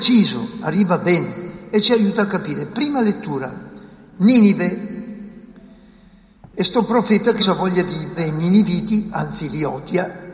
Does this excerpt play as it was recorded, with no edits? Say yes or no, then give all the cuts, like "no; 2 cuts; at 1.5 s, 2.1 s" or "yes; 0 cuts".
no; 2 cuts; at 7.4 s, 8.2 s